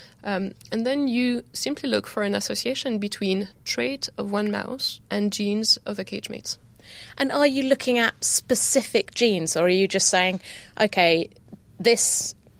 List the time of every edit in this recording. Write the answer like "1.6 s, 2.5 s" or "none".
5.0 s